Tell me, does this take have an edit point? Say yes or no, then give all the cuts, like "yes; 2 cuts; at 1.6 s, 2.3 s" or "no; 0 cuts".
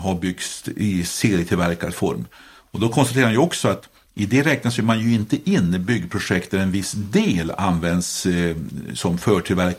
no; 0 cuts